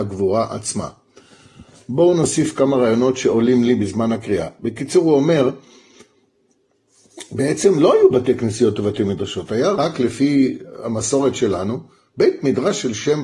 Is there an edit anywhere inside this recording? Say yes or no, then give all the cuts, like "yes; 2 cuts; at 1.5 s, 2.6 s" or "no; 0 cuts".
no; 0 cuts